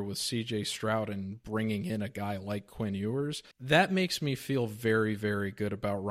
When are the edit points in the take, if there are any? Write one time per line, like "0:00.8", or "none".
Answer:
0:03.5